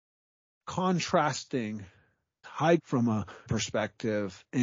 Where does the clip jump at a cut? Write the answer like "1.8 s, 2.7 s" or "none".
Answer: 2.4 s, 2.8 s, 3.5 s